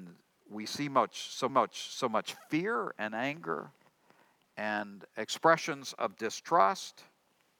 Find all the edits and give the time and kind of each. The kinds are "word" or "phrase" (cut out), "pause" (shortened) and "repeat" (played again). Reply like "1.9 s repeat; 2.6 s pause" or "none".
1.5 s repeat